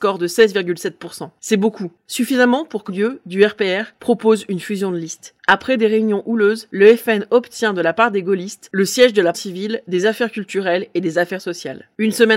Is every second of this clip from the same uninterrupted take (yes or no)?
no